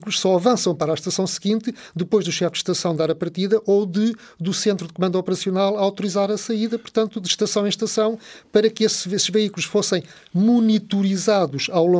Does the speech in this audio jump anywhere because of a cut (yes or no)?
no